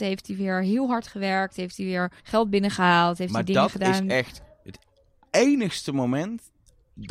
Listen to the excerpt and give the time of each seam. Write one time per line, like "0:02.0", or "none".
0:02.2